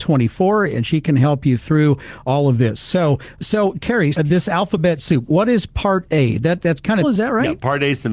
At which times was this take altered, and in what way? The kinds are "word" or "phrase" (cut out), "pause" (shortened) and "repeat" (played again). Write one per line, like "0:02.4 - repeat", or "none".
0:03.4 - word
0:04.1 - word
0:07.0 - phrase